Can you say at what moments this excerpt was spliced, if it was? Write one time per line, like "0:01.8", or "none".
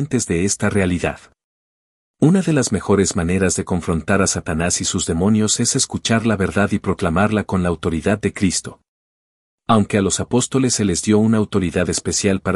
none